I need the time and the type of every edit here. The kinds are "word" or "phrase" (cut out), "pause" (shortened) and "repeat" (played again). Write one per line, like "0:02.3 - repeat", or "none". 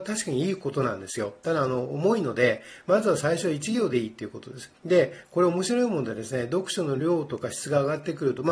0:04.8 - pause